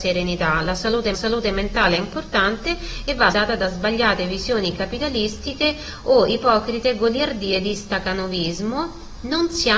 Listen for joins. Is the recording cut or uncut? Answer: cut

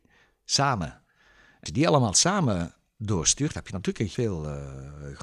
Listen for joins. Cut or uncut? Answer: cut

